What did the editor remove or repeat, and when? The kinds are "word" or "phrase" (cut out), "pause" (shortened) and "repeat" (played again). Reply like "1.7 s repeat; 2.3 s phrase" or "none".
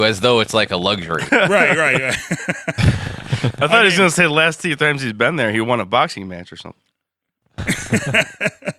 1.3 s word